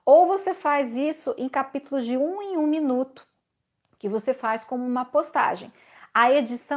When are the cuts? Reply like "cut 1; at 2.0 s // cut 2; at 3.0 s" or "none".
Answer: none